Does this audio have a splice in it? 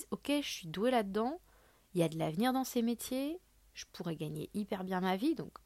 no; 0 cuts

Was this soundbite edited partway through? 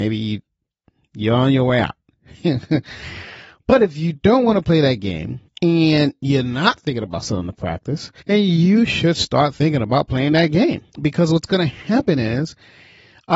yes; 3 cuts; at 5.5 s, 8.2 s, 10.9 s

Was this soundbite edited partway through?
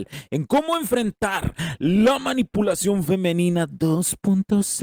no; 0 cuts

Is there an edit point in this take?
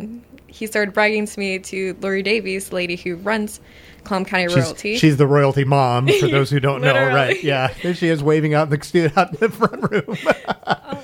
no; 0 cuts

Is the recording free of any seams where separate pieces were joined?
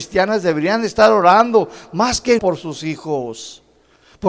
no; 1 cut; at 2.4 s

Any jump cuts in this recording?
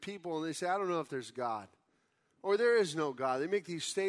no; 0 cuts

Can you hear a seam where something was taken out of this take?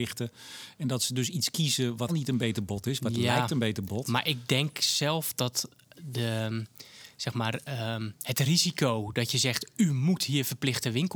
yes; 1 cut; at 2.1 s

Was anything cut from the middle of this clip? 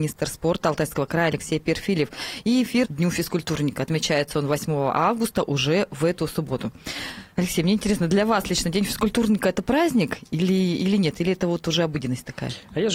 yes; 1 cut; at 2.8 s

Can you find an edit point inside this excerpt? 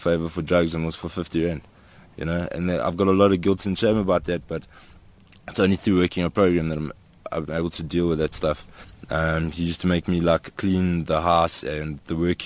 no; 0 cuts

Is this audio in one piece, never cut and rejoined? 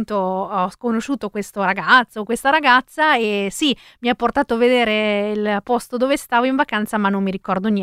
yes; 0 cuts

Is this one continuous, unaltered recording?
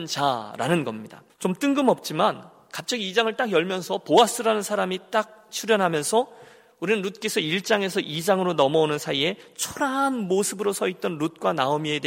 no; 1 cut; at 1.3 s

